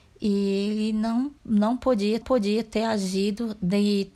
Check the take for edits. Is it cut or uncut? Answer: cut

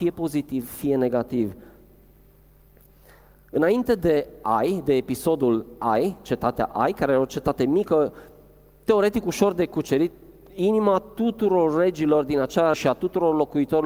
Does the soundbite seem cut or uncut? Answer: cut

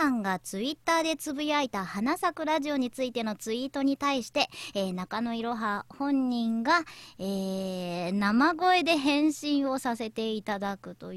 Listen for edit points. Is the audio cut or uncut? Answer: uncut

